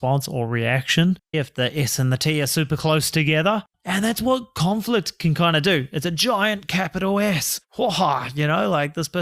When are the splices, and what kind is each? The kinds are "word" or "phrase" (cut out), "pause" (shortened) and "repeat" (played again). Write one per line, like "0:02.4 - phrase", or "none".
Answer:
0:01.3 - word
0:03.7 - pause
0:07.6 - pause